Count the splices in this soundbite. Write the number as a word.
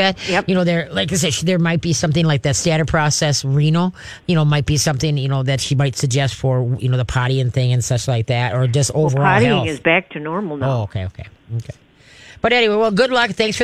zero